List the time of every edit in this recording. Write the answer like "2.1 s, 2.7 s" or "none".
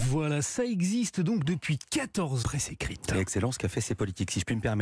2.4 s

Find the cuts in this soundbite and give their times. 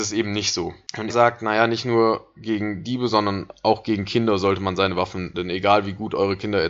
1.1 s, 5.3 s

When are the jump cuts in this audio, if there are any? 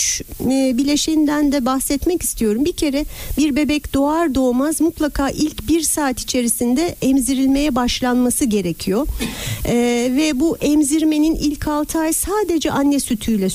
none

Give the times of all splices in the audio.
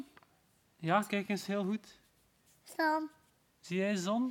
none

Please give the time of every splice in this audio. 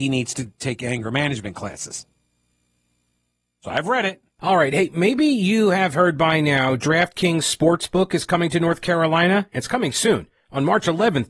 4.3 s

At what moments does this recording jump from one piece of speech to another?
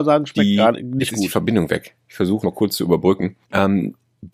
2.4 s, 3.4 s

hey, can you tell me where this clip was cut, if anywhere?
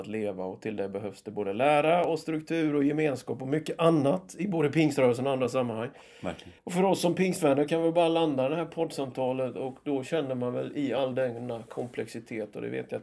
6.6 s

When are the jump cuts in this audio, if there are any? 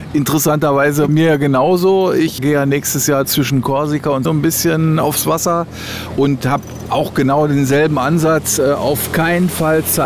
1.1 s, 2.4 s, 3.2 s, 4.3 s

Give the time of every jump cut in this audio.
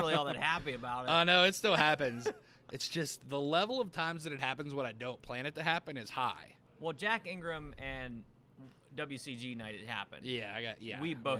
none

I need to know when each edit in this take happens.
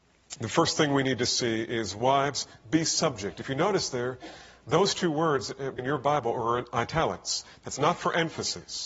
5.8 s

